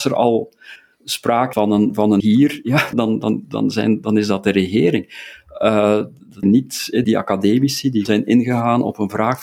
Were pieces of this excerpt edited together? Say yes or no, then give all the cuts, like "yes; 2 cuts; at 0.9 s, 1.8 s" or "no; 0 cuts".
yes; 6 cuts; at 1.5 s, 2.2 s, 2.9 s, 6.4 s, 7.0 s, 8.0 s